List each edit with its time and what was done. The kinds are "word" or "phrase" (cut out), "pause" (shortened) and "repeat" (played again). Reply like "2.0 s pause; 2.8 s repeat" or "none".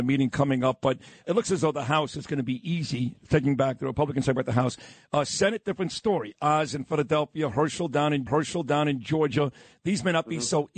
1.2 s word; 8.3 s repeat

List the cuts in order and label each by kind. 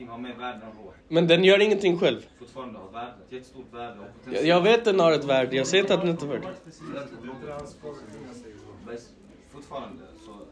1.0 s pause; 2.3 s pause; 3.2 s pause

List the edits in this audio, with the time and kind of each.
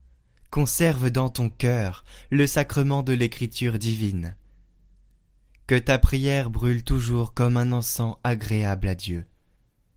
none

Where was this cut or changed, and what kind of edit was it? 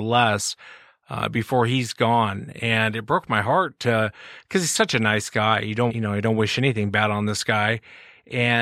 5.9 s word

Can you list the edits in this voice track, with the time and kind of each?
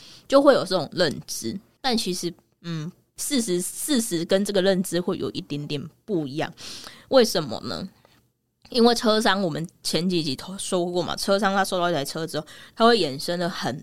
none

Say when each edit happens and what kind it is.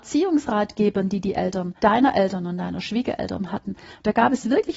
1.8 s pause

